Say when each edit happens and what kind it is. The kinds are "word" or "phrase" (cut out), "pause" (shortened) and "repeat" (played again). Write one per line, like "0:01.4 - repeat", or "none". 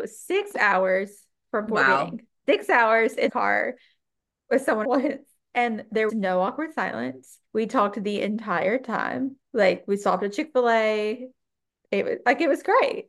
0:02.3 - pause
0:03.3 - word
0:04.8 - phrase
0:06.1 - word
0:07.5 - pause
0:09.5 - pause